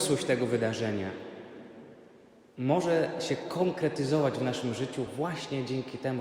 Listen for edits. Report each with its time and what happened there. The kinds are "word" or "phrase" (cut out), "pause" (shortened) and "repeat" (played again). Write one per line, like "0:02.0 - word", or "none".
none